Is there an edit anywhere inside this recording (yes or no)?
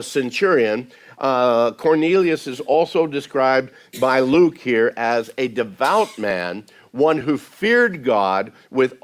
no